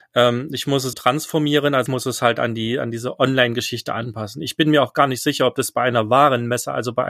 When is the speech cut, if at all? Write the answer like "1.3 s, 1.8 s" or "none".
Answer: 0.9 s, 1.9 s

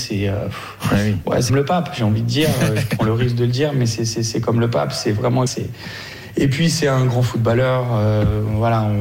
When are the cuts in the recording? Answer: 1.5 s, 4.2 s, 5.5 s

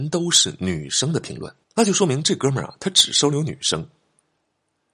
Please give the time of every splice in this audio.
1.6 s

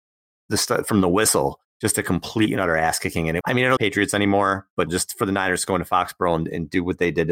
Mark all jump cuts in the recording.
1.7 s, 3.4 s, 3.8 s, 4.9 s

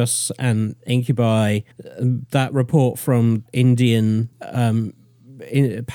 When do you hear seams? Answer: 1.7 s, 3.5 s, 4.3 s

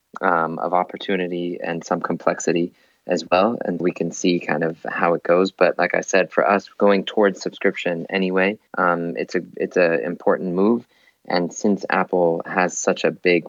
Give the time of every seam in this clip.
3.8 s, 6.7 s, 8.7 s

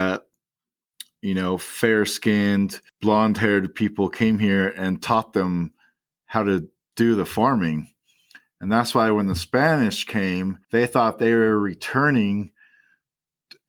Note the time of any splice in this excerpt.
2.9 s, 10.6 s

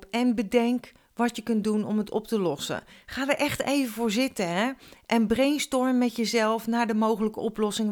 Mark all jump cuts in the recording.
none

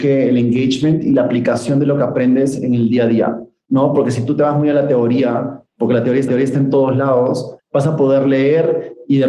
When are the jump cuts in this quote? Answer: 5.7 s, 6.3 s, 7.6 s

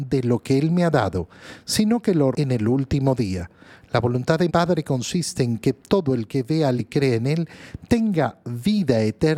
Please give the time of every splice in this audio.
2.3 s, 4.5 s, 6.8 s

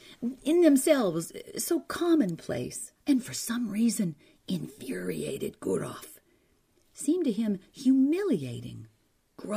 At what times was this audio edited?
3.0 s

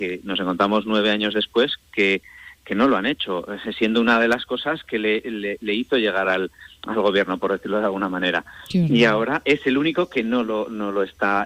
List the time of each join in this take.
none

